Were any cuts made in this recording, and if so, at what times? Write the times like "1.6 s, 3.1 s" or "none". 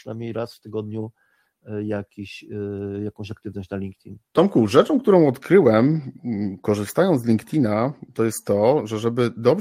4.2 s